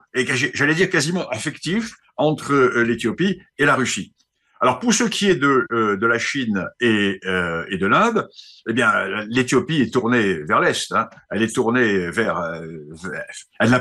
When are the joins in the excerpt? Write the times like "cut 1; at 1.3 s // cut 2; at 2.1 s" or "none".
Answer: none

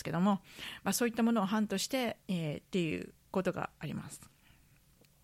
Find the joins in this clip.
cut 1; at 2.2 s // cut 2; at 3.2 s

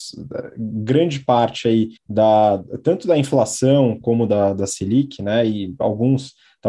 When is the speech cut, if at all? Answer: cut 1; at 2.0 s

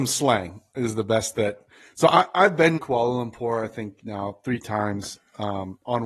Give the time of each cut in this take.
cut 1; at 2.8 s

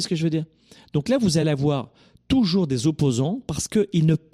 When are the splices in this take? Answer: none

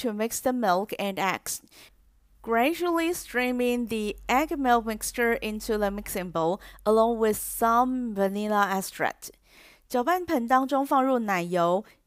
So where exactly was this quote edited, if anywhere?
none

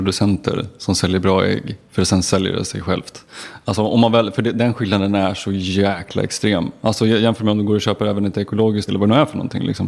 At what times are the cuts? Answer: cut 1; at 8.9 s

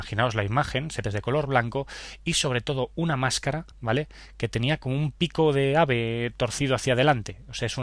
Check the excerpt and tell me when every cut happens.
cut 1; at 1.0 s // cut 2; at 3.7 s

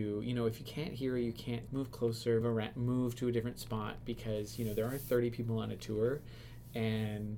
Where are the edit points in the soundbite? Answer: cut 1; at 1.7 s // cut 2; at 2.4 s

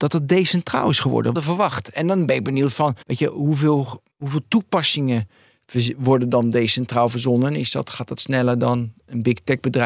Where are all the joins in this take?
cut 1; at 1.3 s // cut 2; at 3.0 s // cut 3; at 4.1 s

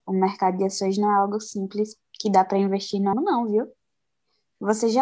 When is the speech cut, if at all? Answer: cut 1; at 3.1 s

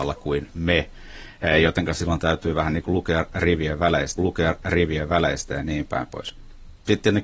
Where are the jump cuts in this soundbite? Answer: cut 1; at 4.2 s

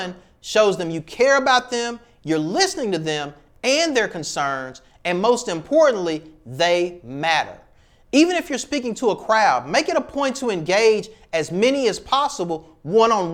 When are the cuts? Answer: none

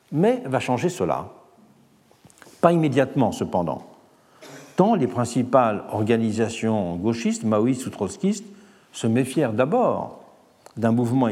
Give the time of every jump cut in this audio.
none

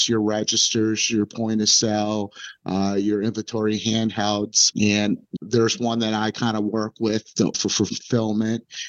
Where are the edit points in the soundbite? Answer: cut 1; at 4.7 s // cut 2; at 5.4 s // cut 3; at 7.5 s

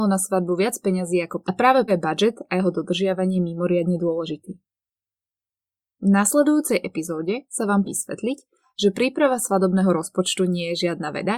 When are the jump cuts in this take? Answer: cut 1; at 1.4 s // cut 2; at 1.9 s // cut 3; at 7.8 s

